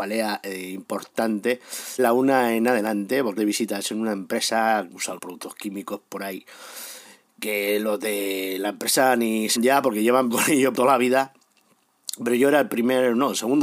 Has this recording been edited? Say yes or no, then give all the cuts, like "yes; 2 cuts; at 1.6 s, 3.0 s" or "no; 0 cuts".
yes; 7 cuts; at 2.0 s, 3.4 s, 4.9 s, 5.2 s, 9.6 s, 10.3 s, 10.7 s